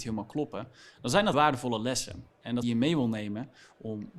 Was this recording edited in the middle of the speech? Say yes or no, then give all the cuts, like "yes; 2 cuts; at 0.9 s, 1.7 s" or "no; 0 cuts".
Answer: yes; 2 cuts; at 1.3 s, 2.6 s